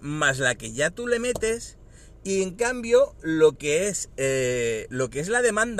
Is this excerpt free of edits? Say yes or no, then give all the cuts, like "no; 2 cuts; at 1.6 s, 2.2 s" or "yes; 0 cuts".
yes; 0 cuts